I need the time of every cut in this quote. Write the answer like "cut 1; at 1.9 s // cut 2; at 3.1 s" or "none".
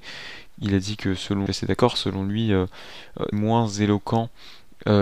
cut 1; at 1.5 s // cut 2; at 3.3 s